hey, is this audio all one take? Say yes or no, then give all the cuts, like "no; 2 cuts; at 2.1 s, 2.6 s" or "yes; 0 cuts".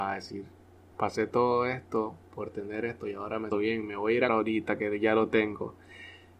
no; 3 cuts; at 0.9 s, 3.5 s, 4.3 s